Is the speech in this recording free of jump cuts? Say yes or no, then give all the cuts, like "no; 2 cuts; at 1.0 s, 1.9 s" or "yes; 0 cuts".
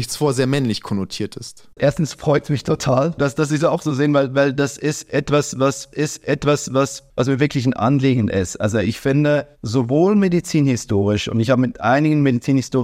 no; 2 cuts; at 5.9 s, 9.5 s